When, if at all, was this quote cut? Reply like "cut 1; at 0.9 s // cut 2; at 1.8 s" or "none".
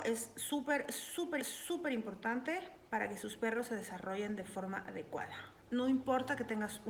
cut 1; at 1.4 s